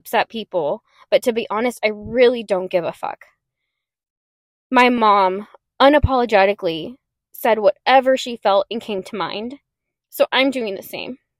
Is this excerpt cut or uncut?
uncut